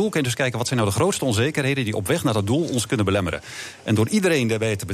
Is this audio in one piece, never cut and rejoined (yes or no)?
yes